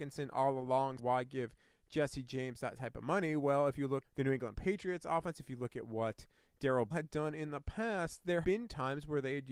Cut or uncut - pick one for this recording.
cut